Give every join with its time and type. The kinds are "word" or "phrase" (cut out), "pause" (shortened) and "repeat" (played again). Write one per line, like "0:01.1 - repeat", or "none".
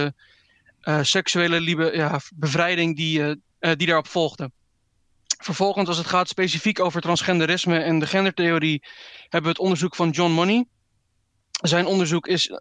none